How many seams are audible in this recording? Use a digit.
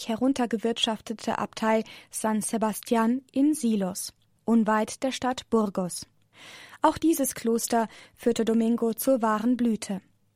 0